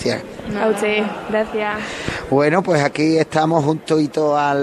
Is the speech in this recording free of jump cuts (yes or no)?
yes